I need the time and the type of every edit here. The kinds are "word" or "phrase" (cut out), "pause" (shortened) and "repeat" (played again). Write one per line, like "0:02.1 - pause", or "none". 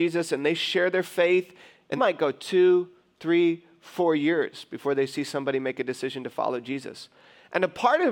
0:02.0 - word